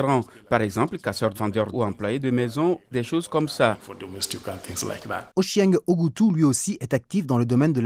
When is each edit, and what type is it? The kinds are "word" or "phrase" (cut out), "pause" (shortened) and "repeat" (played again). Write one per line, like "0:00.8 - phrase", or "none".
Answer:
0:01.3 - phrase
0:01.7 - word
0:02.9 - word
0:05.3 - pause

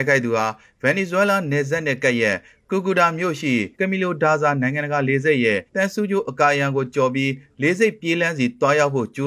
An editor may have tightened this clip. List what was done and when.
0:03.7 - pause
0:05.7 - pause

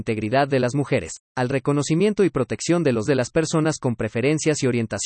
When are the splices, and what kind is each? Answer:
0:01.3 - pause
0:03.1 - word

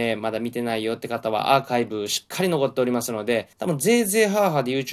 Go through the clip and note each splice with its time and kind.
0:03.5 - pause

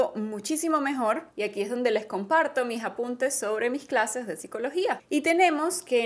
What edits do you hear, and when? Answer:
0:01.3 - pause

